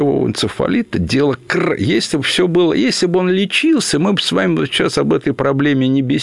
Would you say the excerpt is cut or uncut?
uncut